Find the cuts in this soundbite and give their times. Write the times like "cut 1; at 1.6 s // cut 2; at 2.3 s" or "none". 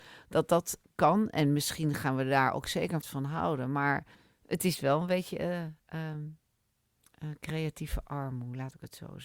cut 1; at 3.0 s // cut 2; at 4.1 s // cut 3; at 5.8 s